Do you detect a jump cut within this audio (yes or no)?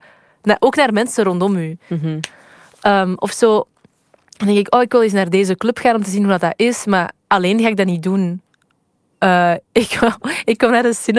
no